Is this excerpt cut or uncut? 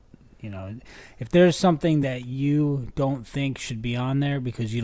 uncut